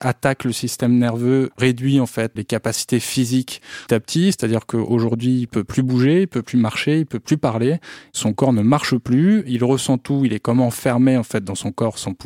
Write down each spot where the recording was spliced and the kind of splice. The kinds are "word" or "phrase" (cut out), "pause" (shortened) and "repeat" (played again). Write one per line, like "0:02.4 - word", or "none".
0:01.5 - word
0:02.4 - word
0:03.9 - word